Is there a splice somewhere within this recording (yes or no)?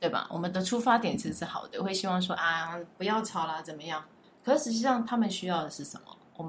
yes